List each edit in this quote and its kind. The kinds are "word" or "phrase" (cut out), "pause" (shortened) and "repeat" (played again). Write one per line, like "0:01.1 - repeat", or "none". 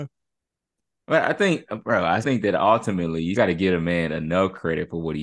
0:02.2 - word
0:03.4 - word